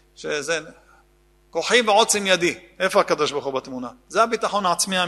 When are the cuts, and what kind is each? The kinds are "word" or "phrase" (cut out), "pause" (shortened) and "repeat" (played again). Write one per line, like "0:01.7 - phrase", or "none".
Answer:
none